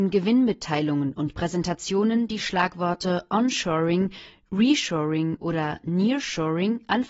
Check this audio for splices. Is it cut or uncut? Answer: uncut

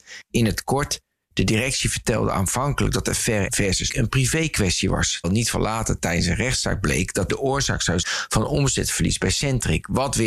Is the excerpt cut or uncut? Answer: cut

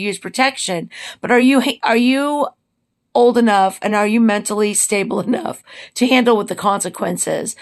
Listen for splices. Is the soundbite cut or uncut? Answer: uncut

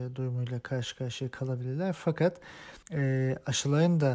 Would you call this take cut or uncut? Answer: cut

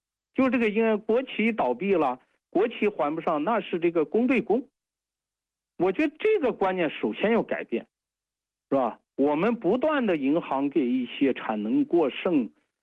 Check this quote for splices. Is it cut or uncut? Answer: cut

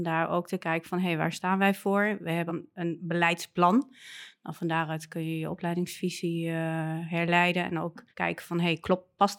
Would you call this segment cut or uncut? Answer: cut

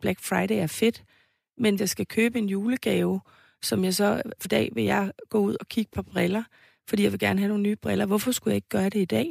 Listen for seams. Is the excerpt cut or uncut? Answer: cut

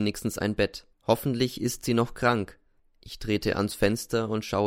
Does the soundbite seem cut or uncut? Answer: cut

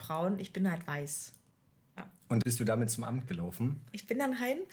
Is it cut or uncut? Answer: cut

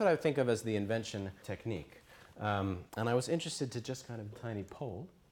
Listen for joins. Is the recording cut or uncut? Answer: cut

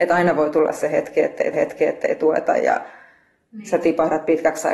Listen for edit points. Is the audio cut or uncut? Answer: cut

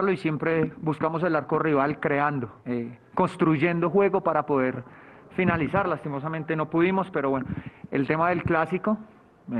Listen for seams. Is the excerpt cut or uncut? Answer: cut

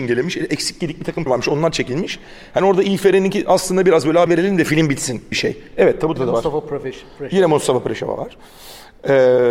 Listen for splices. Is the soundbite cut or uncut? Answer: cut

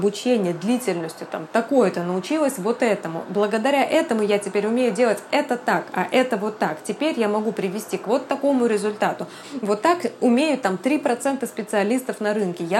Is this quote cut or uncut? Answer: uncut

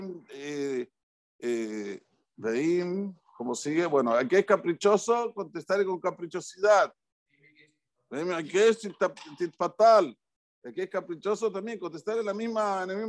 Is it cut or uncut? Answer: uncut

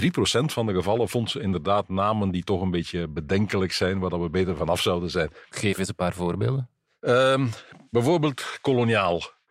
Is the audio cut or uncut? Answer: uncut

